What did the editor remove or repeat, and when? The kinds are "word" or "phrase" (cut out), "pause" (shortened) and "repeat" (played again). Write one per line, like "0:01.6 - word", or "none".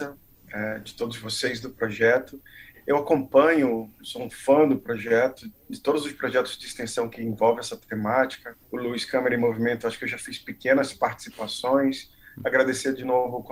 0:08.6 - pause